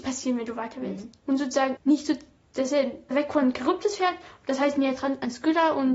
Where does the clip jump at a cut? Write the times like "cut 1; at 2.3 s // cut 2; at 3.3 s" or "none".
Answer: cut 1; at 1.2 s // cut 2; at 1.8 s // cut 3; at 3.1 s